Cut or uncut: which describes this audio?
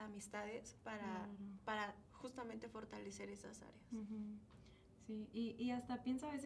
uncut